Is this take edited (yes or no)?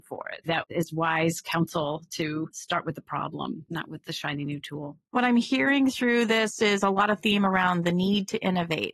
no